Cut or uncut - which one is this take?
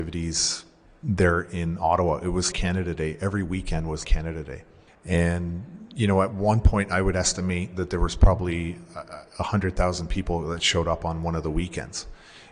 cut